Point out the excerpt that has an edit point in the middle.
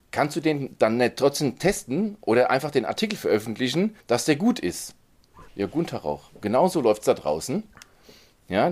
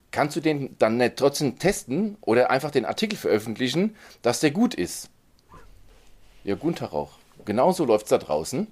first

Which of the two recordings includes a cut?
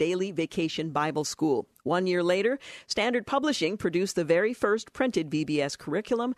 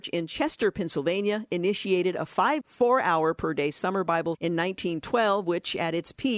second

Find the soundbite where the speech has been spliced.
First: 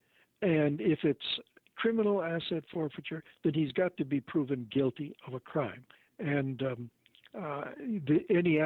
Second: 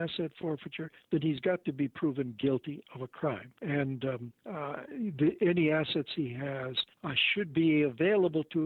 second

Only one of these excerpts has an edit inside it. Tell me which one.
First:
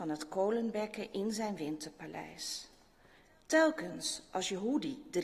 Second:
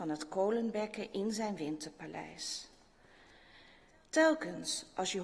first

